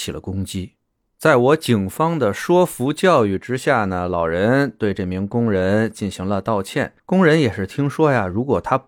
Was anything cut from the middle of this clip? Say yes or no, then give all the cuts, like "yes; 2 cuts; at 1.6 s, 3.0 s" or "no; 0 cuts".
yes; 1 cut; at 7.0 s